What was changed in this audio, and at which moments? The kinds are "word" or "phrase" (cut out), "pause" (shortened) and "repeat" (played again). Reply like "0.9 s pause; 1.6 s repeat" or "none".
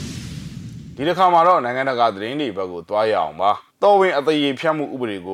3.7 s pause

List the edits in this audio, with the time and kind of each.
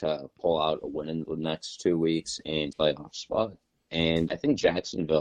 2.7 s word; 4.3 s word

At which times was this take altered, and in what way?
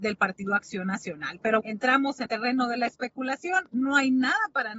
1.6 s word; 2.3 s word

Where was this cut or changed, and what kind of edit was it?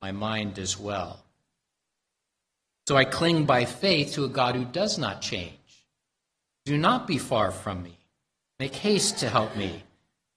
none

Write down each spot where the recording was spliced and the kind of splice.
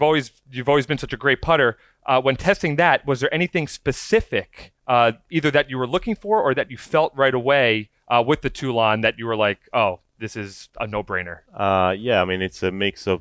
4.8 s pause; 11.5 s pause

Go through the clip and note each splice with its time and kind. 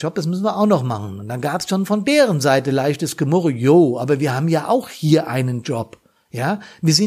none

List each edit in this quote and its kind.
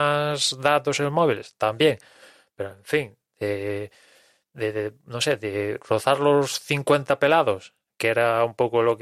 none

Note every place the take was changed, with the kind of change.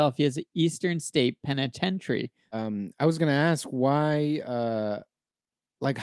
none

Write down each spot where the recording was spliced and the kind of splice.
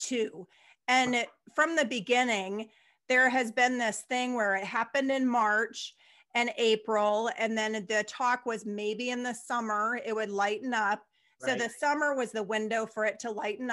none

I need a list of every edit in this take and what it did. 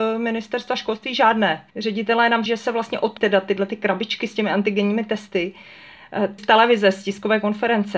1.7 s pause; 2.5 s word; 3.2 s phrase; 6.4 s word

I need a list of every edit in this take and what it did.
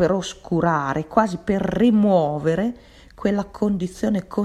none

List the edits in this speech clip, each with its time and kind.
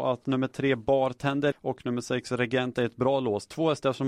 1.5 s word; 2.7 s word

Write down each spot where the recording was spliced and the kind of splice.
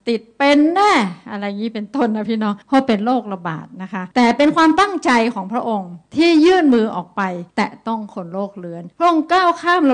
2.6 s pause; 4.1 s pause; 6.1 s pause; 7.5 s pause; 8.9 s pause

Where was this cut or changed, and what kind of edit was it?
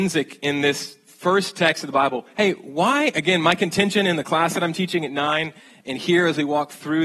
none

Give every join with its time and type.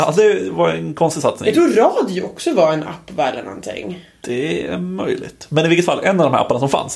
none

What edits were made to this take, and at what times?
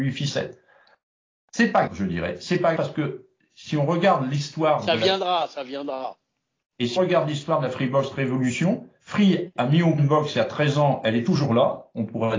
1.9 s word; 2.8 s word; 7.0 s word; 10.0 s word

